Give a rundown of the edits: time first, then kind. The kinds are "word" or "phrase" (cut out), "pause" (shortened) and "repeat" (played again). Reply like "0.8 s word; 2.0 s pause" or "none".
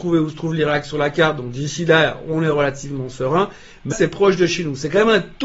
3.9 s word